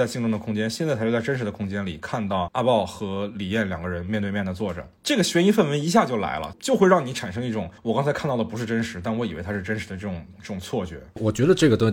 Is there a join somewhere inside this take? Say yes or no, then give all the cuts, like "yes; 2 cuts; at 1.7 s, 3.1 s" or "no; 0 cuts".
yes; 1 cut; at 7.8 s